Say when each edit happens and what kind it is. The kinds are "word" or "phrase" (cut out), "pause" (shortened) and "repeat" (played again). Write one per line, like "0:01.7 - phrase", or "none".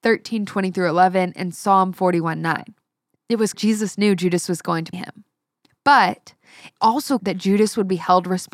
0:03.5 - word
0:04.9 - word
0:06.8 - word
0:07.2 - word